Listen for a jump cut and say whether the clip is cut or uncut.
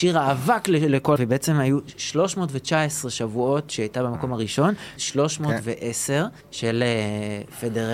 cut